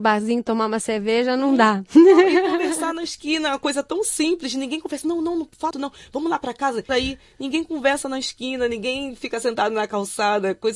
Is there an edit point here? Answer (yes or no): yes